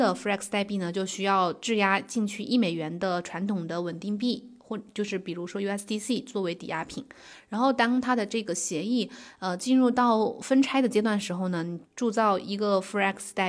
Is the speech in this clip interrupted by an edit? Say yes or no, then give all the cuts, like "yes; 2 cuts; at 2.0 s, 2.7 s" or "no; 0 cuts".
no; 0 cuts